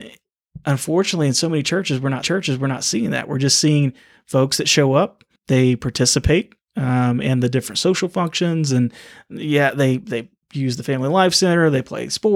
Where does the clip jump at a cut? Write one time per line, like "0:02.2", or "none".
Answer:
0:02.2
0:05.4